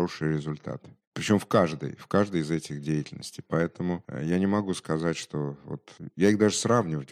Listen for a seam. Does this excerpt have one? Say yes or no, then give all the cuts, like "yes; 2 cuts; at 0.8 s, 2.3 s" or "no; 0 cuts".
no; 0 cuts